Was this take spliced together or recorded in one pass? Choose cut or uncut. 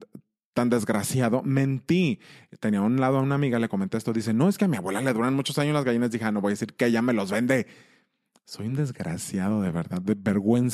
uncut